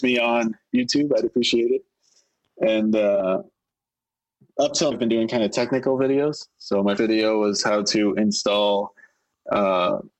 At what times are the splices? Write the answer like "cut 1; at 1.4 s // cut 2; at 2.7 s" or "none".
cut 1; at 4.9 s // cut 2; at 7.0 s